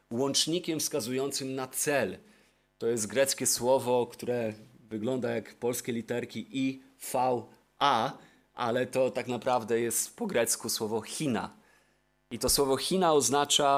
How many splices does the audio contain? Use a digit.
0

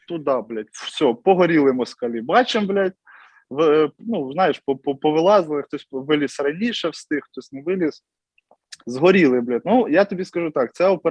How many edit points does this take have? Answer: 1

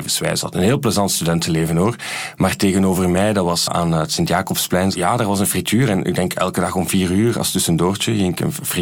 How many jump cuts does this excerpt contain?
1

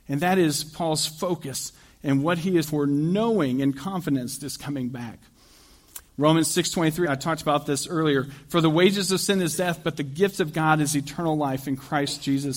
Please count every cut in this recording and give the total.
4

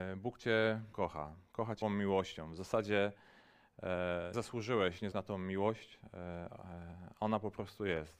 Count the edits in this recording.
4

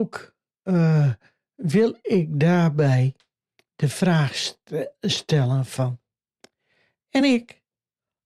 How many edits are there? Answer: 0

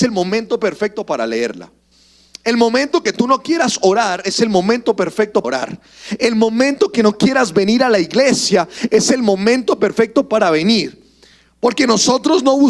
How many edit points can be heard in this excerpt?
1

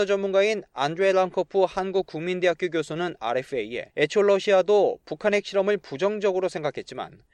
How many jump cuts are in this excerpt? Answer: 1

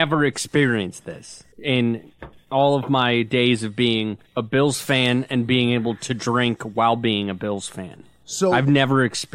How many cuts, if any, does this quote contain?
2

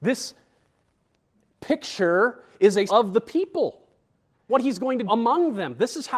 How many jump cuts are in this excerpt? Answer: 3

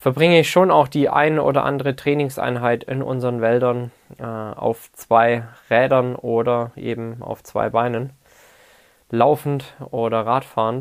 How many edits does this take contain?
0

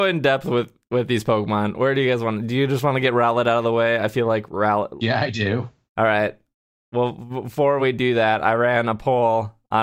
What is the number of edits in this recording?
0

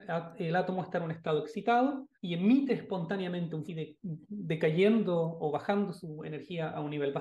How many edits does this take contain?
2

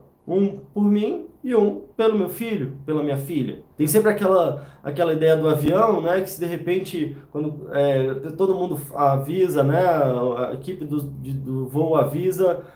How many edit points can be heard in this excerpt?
2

